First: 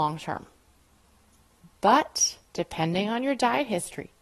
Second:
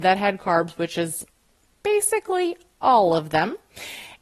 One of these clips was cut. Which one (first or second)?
first